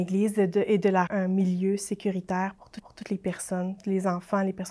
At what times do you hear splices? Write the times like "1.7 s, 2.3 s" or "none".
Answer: 1.1 s, 2.8 s